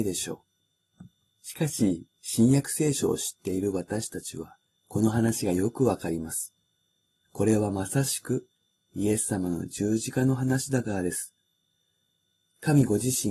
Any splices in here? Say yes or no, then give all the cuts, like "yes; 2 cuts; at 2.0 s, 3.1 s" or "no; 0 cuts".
no; 0 cuts